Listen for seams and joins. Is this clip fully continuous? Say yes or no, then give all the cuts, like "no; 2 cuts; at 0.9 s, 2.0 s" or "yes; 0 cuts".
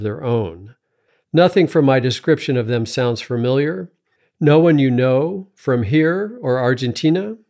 no; 1 cut; at 1.1 s